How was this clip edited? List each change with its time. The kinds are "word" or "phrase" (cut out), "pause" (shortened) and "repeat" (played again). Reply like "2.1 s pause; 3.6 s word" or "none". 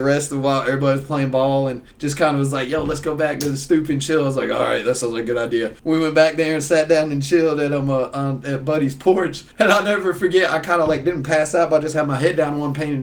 1.9 s pause; 5.8 s pause; 9.5 s pause